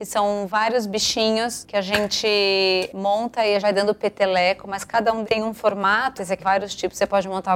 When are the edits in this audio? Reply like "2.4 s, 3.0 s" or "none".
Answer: 3.6 s, 5.2 s, 6.4 s